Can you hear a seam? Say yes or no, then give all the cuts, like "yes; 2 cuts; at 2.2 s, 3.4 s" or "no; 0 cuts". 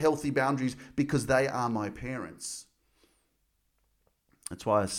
no; 0 cuts